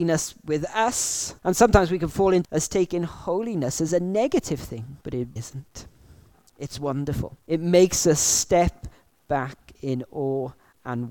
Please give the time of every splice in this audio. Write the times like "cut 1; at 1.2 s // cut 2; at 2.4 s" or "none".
cut 1; at 1.4 s // cut 2; at 2.4 s // cut 3; at 3.9 s // cut 4; at 5.0 s // cut 5; at 5.4 s // cut 6; at 7.4 s